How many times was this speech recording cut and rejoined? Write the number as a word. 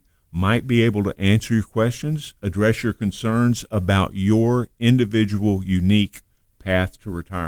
zero